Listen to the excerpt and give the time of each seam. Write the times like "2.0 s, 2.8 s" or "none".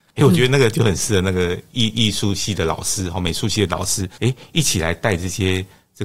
4.1 s